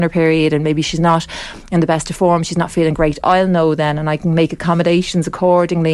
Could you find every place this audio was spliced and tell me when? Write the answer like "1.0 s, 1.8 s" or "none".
none